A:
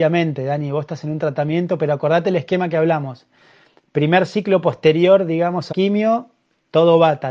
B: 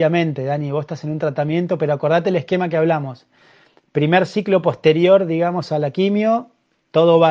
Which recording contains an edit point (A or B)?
A